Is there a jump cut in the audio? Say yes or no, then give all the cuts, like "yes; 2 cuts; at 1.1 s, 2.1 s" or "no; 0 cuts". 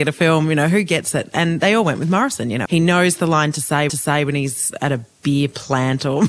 yes; 2 cuts; at 2.7 s, 3.9 s